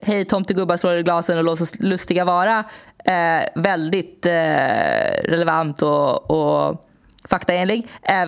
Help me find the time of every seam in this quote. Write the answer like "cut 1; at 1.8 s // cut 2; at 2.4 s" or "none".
none